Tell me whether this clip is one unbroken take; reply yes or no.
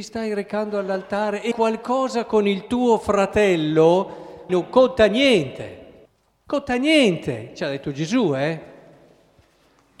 no